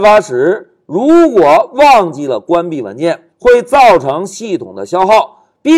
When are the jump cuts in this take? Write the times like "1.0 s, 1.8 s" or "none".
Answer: 3.3 s